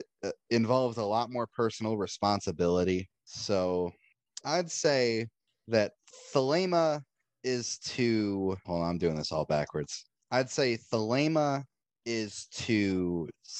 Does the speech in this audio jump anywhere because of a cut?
yes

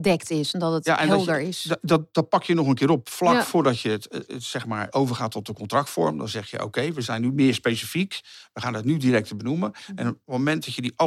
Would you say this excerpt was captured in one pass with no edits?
yes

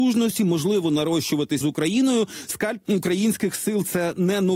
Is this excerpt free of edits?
no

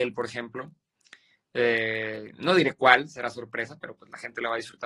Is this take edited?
no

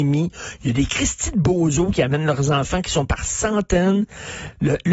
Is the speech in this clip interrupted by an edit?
no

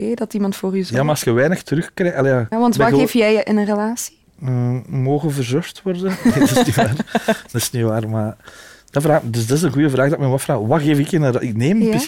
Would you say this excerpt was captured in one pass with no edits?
no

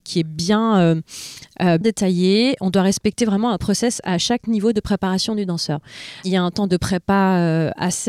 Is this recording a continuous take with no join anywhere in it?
no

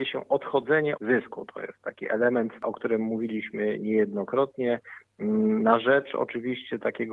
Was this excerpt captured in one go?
no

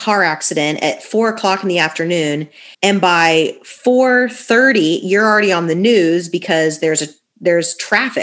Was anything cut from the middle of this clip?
yes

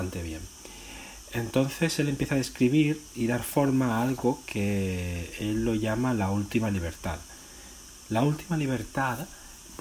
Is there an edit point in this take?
no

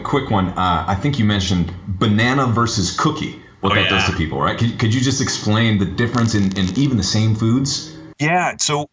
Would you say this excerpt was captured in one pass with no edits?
yes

